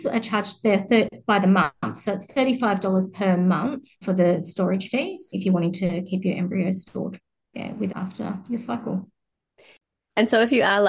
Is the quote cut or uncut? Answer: cut